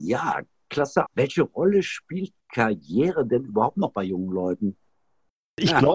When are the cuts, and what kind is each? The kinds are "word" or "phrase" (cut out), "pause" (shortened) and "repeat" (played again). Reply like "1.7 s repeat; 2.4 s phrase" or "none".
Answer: 1.1 s phrase